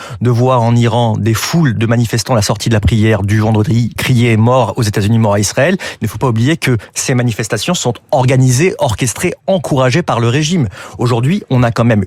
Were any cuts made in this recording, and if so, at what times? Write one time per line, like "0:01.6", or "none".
0:04.0